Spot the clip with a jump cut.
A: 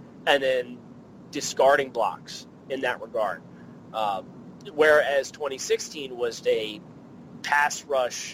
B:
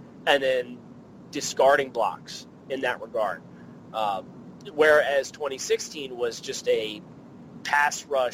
A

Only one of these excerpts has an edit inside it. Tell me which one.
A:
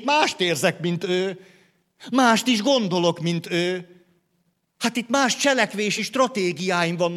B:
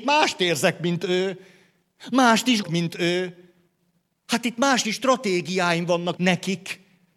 B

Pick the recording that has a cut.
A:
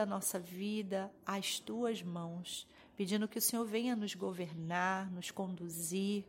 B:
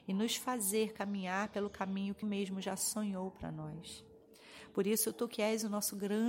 B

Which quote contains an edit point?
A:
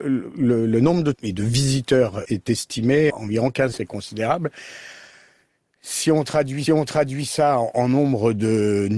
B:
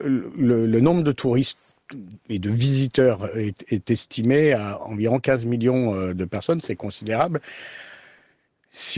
A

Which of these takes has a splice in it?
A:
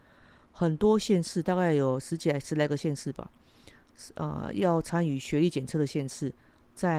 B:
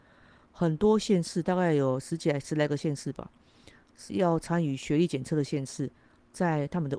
B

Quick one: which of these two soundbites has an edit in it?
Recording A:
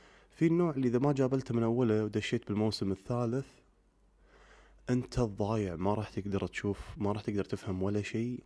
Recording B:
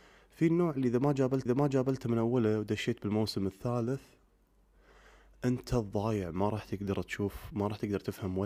B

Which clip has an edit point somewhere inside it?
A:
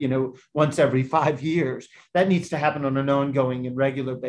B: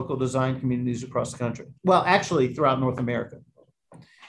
B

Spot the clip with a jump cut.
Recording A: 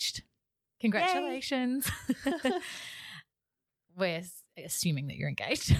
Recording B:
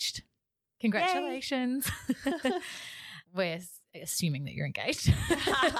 B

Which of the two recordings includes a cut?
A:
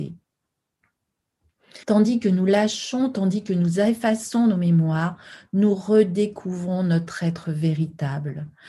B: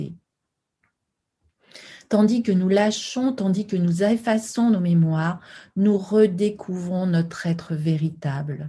A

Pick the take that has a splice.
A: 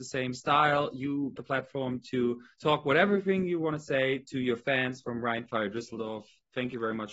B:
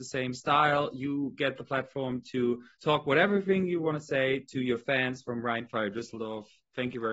A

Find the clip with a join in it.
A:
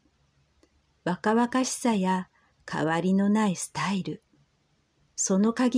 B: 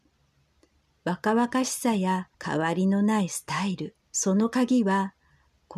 B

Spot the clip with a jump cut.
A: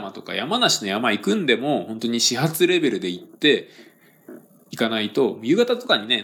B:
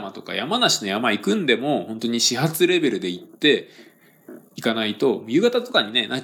B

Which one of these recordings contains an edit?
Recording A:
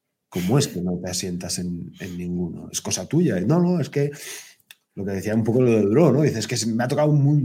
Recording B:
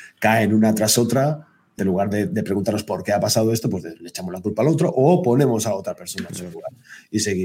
B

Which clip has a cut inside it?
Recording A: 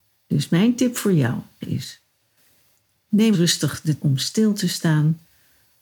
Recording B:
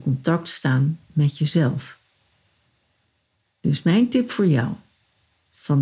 A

